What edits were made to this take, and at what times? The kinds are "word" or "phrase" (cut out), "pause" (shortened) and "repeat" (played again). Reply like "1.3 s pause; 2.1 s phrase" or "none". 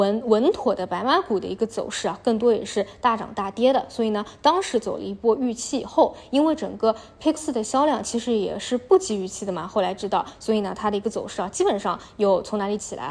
7.4 s word

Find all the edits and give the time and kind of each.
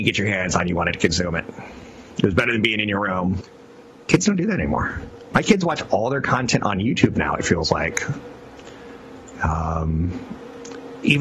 none

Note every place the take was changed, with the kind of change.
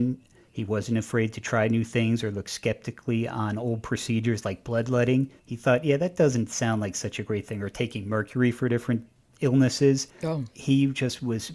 5.4 s pause; 10.1 s pause

